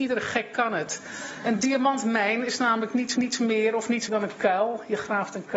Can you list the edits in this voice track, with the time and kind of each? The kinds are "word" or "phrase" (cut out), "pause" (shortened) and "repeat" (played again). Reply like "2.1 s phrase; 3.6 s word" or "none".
3.2 s repeat; 4.1 s word